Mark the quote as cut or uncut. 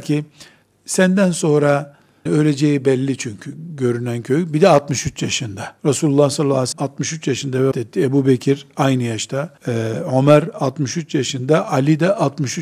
cut